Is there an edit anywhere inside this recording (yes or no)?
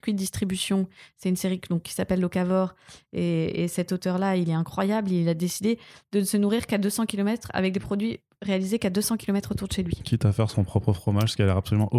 no